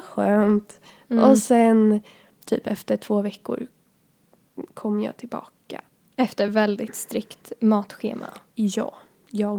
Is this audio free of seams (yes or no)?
yes